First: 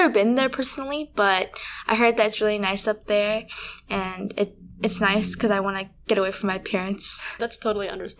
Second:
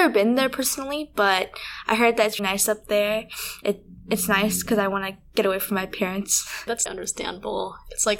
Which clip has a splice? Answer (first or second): second